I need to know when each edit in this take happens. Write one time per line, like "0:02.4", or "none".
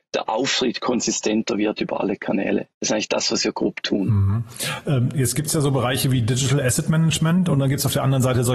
0:02.7